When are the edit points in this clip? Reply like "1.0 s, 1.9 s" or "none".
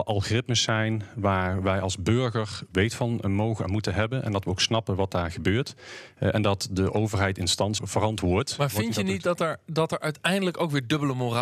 7.8 s